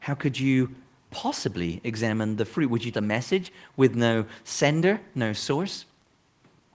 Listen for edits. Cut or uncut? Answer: cut